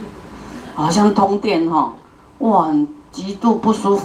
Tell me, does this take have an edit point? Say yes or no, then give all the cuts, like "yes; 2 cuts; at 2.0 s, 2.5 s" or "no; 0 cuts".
no; 0 cuts